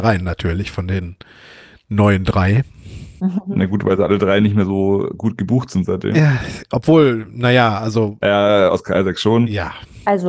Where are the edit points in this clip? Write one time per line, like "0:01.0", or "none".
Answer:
none